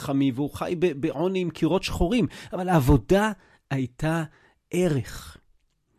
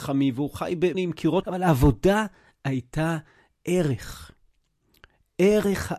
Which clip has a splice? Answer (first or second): second